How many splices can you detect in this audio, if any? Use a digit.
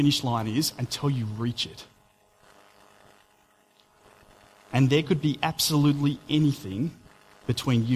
0